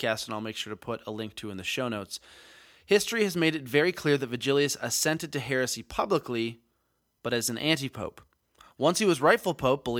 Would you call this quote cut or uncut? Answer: uncut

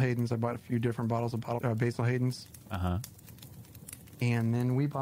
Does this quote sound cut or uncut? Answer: cut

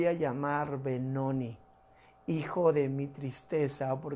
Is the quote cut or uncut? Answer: uncut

